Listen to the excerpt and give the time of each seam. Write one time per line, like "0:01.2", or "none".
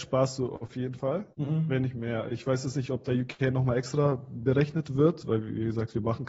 0:01.3